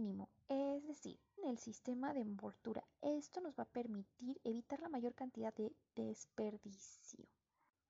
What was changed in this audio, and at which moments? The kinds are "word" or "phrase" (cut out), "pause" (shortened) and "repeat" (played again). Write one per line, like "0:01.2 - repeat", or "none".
0:01.4 - word
0:05.5 - word